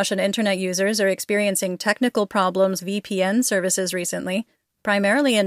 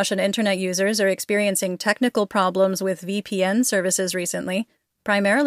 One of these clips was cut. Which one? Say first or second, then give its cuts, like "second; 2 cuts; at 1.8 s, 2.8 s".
first; 1 cut; at 2.8 s